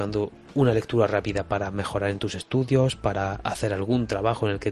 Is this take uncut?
yes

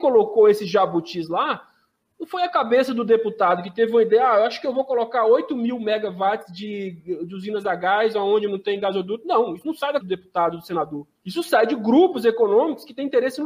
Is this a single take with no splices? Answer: no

